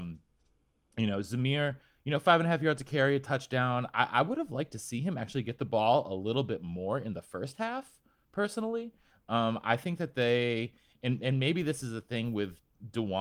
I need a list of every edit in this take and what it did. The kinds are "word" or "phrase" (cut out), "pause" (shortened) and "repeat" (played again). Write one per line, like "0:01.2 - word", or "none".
none